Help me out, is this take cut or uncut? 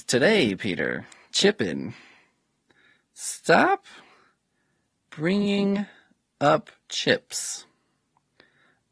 uncut